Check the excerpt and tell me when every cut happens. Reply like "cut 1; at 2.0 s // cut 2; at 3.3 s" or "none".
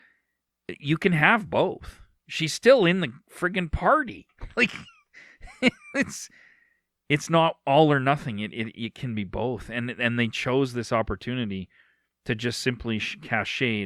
none